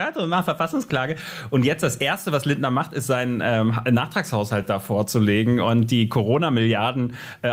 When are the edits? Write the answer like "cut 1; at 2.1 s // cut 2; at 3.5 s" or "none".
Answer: none